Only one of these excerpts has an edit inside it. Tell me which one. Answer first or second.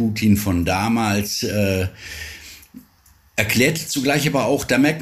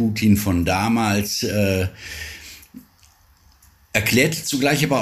first